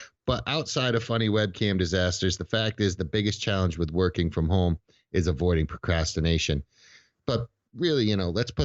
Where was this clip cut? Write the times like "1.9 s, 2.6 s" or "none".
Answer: none